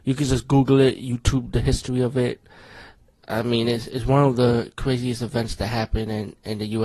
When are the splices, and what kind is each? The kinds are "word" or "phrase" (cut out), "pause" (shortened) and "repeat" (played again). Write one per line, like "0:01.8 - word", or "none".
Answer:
none